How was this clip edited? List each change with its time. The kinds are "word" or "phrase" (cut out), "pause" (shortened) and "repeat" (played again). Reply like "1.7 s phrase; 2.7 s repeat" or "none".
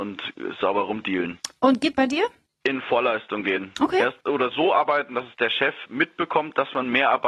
1.9 s phrase; 2.5 s pause; 4.2 s phrase; 4.5 s word